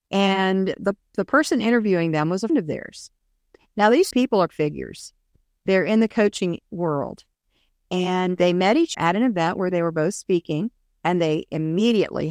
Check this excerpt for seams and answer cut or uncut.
cut